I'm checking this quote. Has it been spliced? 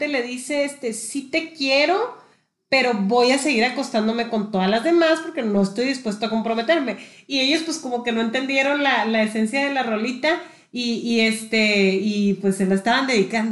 no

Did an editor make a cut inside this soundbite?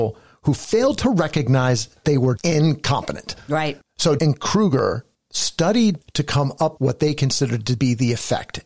yes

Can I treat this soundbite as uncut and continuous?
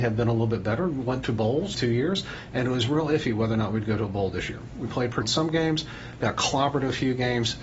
no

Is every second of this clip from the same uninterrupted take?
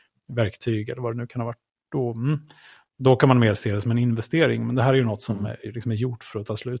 yes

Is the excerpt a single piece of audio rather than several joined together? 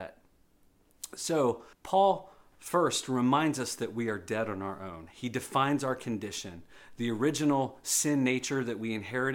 no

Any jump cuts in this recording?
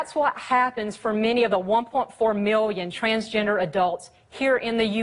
no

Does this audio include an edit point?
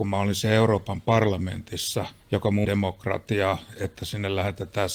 yes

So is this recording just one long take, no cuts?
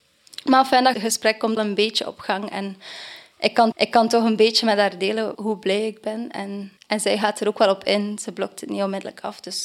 no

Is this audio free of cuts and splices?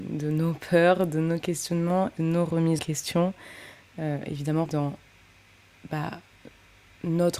no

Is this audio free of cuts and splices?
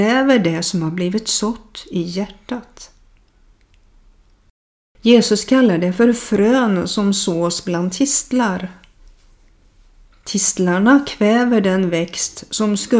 yes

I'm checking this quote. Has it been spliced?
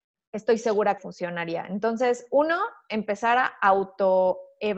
yes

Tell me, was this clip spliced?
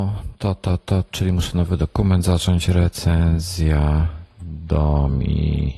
yes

